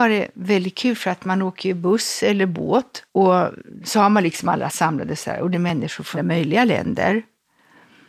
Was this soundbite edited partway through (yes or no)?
yes